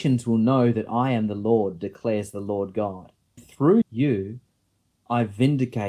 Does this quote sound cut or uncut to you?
cut